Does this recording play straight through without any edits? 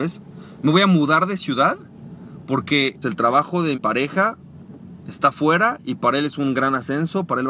no; 2 cuts; at 3.0 s, 3.7 s

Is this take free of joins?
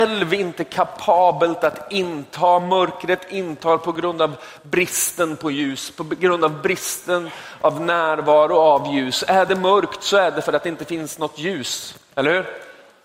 yes; 0 cuts

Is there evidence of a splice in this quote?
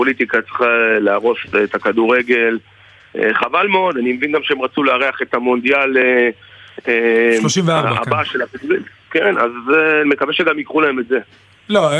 no; 0 cuts

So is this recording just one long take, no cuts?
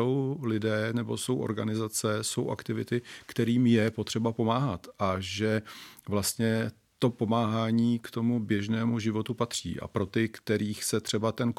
yes; 0 cuts

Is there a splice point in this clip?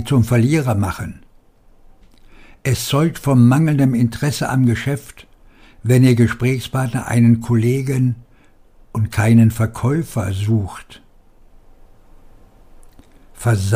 no; 0 cuts

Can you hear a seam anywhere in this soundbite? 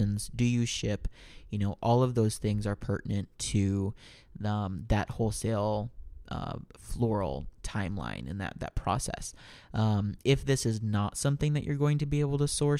no; 0 cuts

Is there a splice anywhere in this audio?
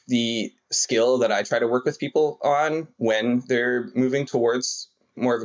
no; 0 cuts

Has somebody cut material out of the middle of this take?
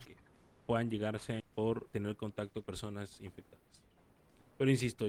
yes; 3 cuts; at 1.4 s, 1.9 s, 2.6 s

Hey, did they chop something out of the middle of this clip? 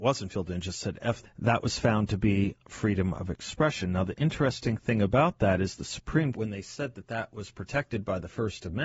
yes; 3 cuts; at 1.2 s, 2.6 s, 6.3 s

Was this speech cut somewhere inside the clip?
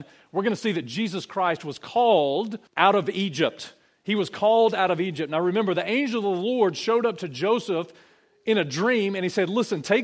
yes; 1 cut; at 2.7 s

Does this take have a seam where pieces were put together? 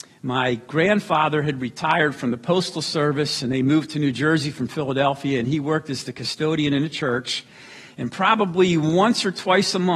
no; 0 cuts

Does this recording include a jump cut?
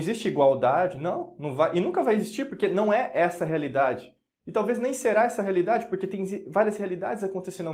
no; 0 cuts

